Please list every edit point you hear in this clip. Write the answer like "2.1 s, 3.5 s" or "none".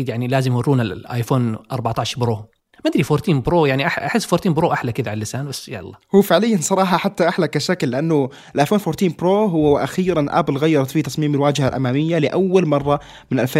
none